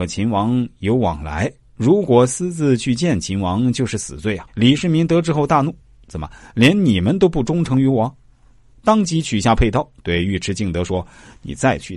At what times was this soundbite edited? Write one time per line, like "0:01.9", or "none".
0:04.5
0:05.8
0:10.0